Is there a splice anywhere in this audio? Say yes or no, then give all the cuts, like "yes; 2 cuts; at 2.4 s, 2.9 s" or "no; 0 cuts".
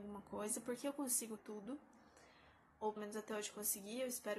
yes; 2 cuts; at 1.4 s, 3.0 s